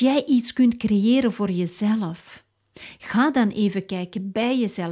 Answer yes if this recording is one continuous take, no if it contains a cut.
yes